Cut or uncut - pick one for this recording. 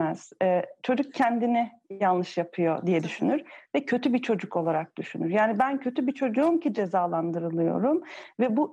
uncut